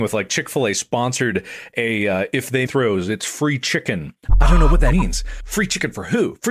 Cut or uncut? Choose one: cut